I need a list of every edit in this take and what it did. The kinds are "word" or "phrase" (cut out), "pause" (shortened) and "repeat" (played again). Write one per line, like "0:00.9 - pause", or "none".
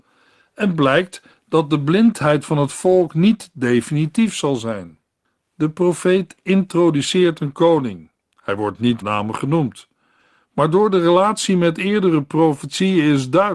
0:09.0 - word